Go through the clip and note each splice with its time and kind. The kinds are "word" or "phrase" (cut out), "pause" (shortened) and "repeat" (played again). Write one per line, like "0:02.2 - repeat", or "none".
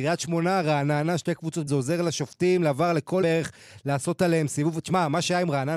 0:01.7 - phrase
0:03.2 - word